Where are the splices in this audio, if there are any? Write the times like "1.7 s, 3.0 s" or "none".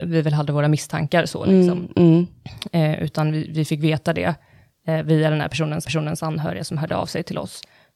5.8 s